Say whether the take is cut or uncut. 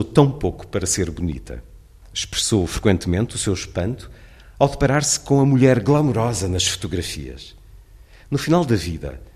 uncut